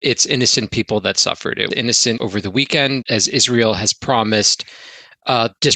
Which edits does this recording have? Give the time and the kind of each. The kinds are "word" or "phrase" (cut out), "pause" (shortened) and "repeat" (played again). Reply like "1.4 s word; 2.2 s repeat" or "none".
1.7 s word; 2.2 s word; 3.0 s word